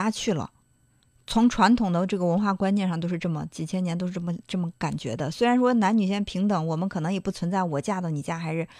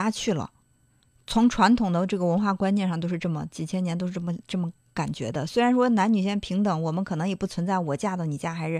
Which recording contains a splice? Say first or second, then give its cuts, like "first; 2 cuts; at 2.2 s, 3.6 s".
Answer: first; 1 cut; at 4.7 s